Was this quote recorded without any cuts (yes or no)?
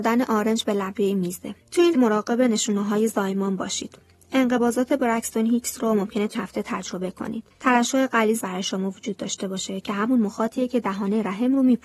no